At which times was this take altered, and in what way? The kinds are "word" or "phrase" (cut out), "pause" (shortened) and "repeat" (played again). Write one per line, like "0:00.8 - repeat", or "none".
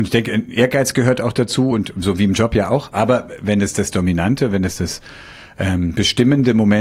none